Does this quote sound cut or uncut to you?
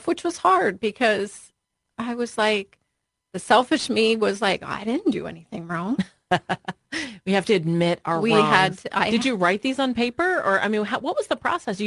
uncut